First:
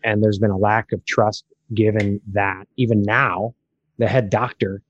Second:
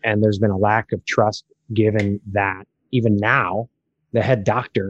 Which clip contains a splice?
first; 1 cut; at 2.7 s

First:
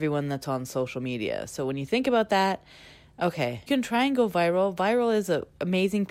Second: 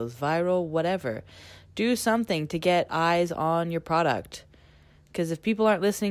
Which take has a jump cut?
first; 1 cut; at 3.7 s

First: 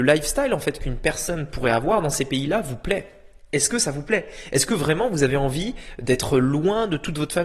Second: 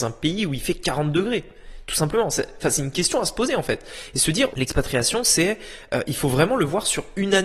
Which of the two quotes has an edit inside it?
second; 1 cut; at 4.5 s

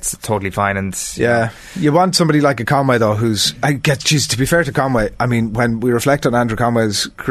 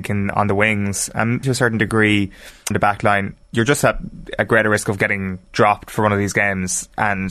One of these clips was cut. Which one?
second; 3 cuts; at 1.4 s, 2.7 s, 3.4 s

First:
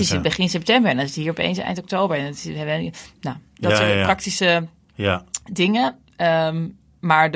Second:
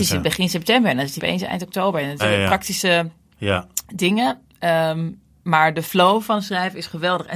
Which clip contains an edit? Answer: second; 2 cuts; at 1.2 s, 2.2 s

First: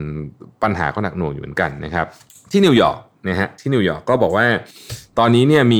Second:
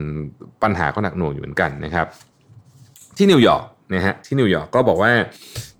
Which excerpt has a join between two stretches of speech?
first; 1 cut; at 2.3 s

